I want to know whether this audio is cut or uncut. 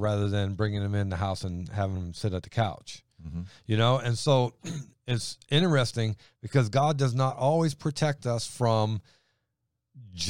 uncut